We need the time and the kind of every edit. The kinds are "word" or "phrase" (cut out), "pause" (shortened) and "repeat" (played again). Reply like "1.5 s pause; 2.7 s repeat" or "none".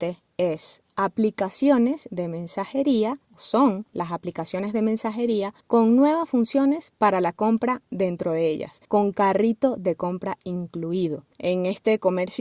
3.2 s pause; 5.6 s pause; 8.8 s pause; 11.3 s pause

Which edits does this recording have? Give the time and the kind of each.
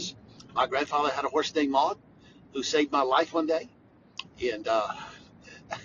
none

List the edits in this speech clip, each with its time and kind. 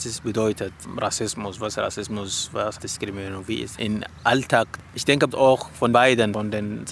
1.7 s word; 2.8 s word; 3.7 s word; 5.3 s word; 5.9 s word

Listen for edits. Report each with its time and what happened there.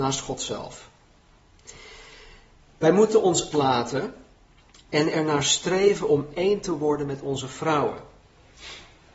3.5 s phrase

